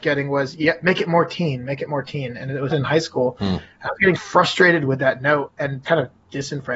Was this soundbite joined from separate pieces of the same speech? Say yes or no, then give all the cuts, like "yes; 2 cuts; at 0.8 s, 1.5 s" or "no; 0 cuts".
yes; 3 cuts; at 2.7 s, 4.2 s, 5.8 s